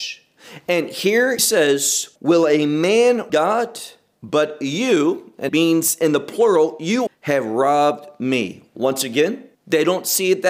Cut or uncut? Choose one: cut